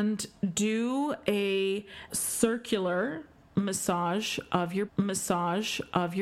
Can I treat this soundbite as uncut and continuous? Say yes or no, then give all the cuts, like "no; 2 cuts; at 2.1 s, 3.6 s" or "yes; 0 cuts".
no; 2 cuts; at 2.1 s, 4.9 s